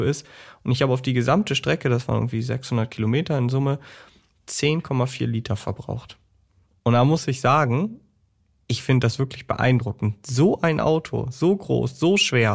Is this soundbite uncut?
yes; 0 cuts

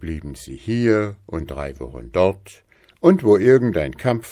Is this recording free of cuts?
yes; 0 cuts

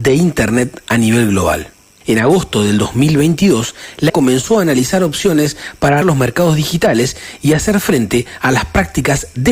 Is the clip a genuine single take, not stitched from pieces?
no; 2 cuts; at 4.1 s, 6.0 s

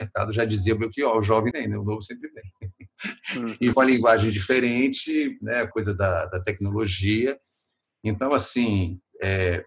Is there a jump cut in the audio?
yes; 3 cuts; at 1.5 s, 3.7 s, 5.7 s

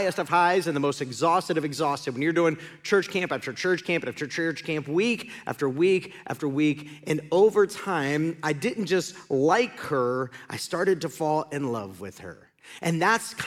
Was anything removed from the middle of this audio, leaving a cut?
no; 0 cuts

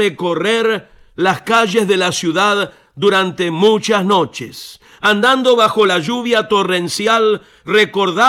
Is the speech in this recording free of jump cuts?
yes; 0 cuts

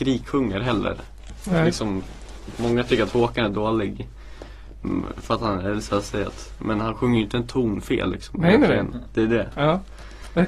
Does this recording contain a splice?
no; 0 cuts

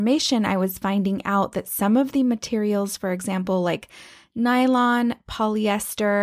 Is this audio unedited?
yes; 0 cuts

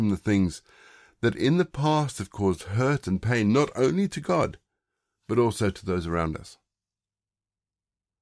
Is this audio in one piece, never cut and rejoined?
yes; 0 cuts

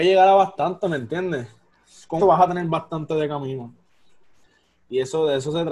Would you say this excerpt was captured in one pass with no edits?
no; 1 cut; at 2.2 s

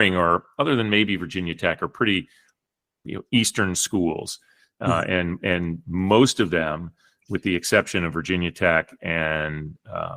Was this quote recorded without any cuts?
yes; 0 cuts

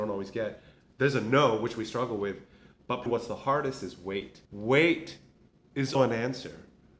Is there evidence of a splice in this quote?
yes; 3 cuts; at 3.1 s, 4.4 s, 5.9 s

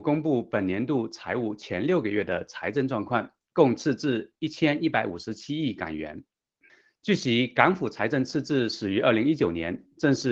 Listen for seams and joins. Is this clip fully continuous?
no; 2 cuts; at 3.4 s, 6.7 s

